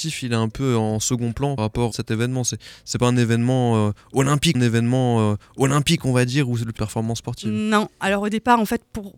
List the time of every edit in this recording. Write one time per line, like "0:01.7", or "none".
0:01.6
0:01.9
0:04.5
0:06.8